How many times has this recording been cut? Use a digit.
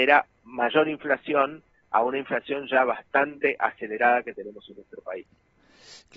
0